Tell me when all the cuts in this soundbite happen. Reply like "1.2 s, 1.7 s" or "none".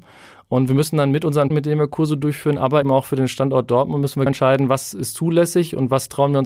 1.5 s, 2.8 s, 4.3 s